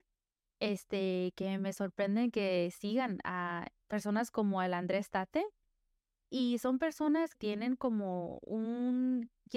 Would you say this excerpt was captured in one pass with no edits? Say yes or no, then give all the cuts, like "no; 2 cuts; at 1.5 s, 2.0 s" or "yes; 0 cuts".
no; 2 cuts; at 3.8 s, 7.3 s